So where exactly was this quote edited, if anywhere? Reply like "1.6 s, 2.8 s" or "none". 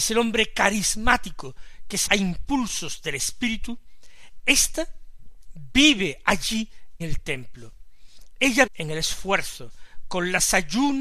2.1 s, 7.0 s, 8.7 s